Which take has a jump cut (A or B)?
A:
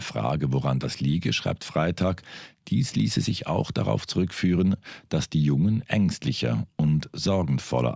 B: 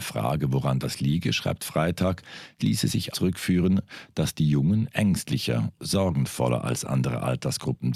B